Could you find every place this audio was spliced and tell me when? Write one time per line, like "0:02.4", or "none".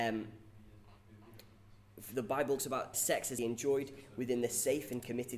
0:02.6
0:02.9
0:03.4